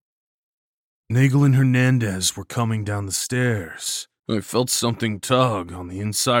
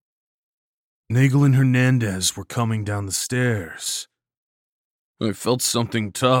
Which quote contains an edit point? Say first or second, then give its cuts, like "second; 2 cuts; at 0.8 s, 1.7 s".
first; 1 cut; at 4.2 s